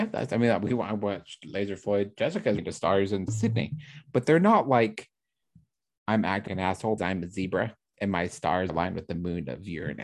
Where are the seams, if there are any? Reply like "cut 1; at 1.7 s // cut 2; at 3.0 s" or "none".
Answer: cut 1; at 2.6 s // cut 2; at 3.3 s // cut 3; at 6.5 s // cut 4; at 7.0 s // cut 5; at 8.7 s